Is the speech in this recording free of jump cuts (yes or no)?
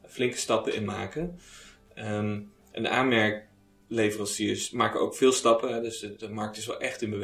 yes